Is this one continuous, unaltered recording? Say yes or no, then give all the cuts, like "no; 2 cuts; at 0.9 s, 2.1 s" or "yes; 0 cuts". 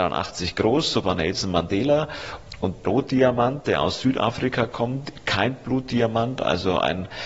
no; 2 cuts; at 1.0 s, 2.8 s